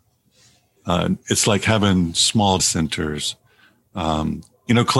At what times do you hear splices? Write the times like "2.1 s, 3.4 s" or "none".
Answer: 2.6 s